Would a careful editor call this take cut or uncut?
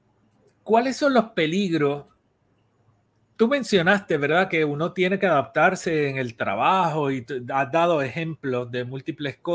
uncut